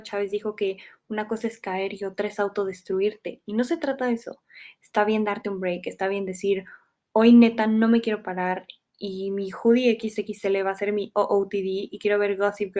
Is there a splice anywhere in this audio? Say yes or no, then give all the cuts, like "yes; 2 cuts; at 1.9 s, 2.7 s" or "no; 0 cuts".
no; 0 cuts